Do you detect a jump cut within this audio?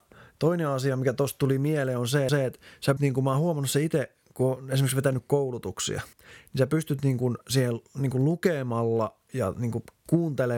yes; 5 cuts; at 2.3 s, 3.0 s, 6.1 s, 7.9 s, 9.3 s

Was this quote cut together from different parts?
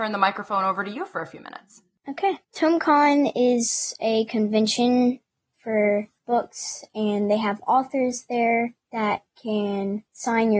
yes; 2 cuts; at 2.4 s, 5.5 s

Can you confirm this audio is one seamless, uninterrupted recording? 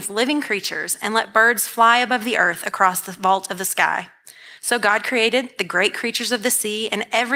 yes; 0 cuts

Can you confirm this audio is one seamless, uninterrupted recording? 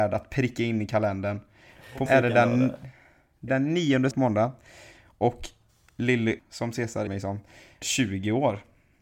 no; 6 cuts; at 2.1 s, 3.5 s, 4.1 s, 6.4 s, 7.1 s, 7.8 s

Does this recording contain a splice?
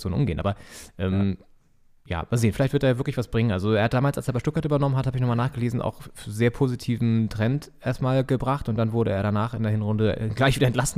no; 0 cuts

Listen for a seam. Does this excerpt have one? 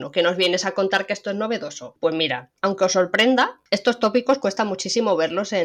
yes; 1 cut; at 2.6 s

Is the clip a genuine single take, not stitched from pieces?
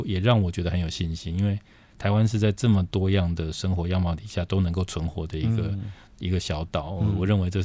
yes; 0 cuts

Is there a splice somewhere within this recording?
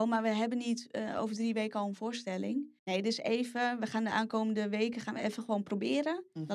yes; 1 cut; at 2.8 s

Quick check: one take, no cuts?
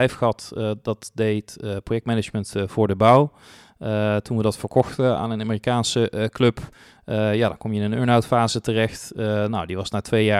yes; 0 cuts

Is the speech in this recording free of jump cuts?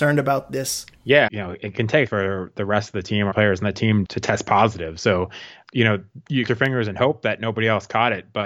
no; 5 cuts; at 1.3 s, 2.1 s, 3.3 s, 4.0 s, 6.5 s

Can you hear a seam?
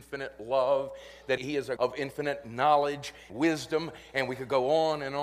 yes; 3 cuts; at 1.4 s, 1.8 s, 3.3 s

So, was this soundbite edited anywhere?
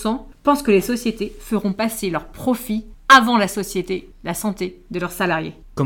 no; 0 cuts

